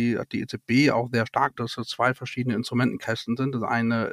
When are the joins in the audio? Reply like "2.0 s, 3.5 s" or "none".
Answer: 1.6 s